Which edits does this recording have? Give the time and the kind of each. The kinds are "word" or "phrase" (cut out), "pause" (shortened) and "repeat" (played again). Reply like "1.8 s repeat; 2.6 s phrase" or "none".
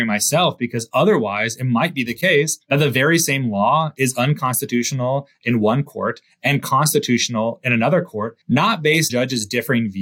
2.6 s pause; 8.4 s pause; 9.1 s word